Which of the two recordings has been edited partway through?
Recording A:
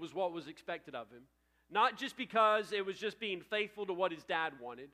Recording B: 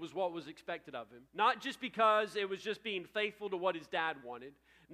B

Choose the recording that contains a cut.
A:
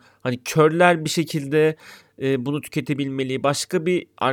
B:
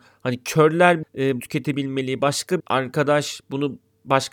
B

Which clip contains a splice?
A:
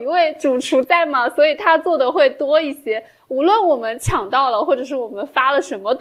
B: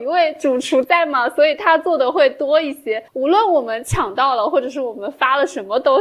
B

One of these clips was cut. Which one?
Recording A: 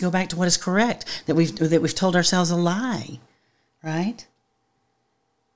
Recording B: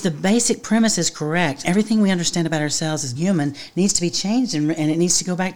B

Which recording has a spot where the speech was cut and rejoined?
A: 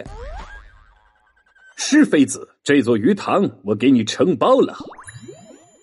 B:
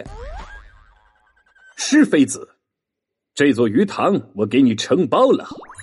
A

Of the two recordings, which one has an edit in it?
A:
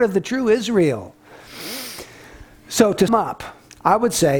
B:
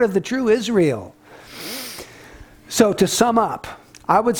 A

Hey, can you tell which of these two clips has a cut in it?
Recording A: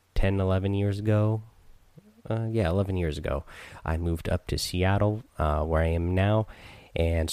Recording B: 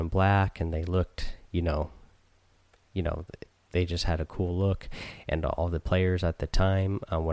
A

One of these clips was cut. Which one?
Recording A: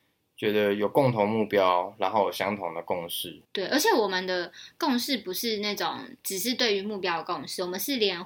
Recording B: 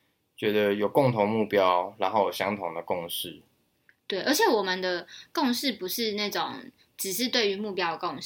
A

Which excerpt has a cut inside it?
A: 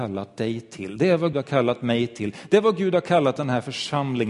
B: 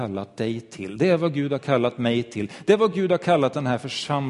A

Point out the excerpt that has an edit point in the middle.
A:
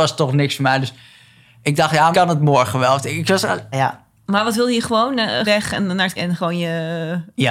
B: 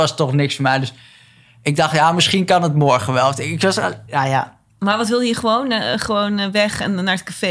A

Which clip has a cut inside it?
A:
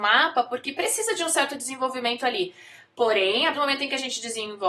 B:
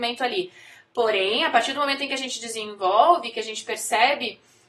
A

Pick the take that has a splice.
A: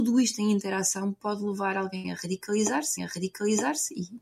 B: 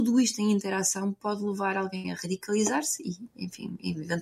A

